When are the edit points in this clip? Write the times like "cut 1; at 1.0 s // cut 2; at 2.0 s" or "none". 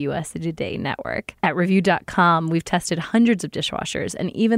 cut 1; at 1.4 s